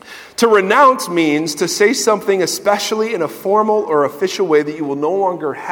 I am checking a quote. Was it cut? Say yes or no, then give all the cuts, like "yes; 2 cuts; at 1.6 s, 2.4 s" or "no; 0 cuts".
no; 0 cuts